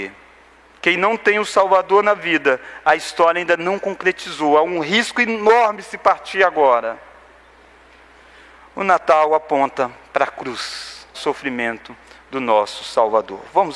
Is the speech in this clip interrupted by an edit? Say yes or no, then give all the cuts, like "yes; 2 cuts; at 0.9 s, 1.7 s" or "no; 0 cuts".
yes; 1 cut; at 11.1 s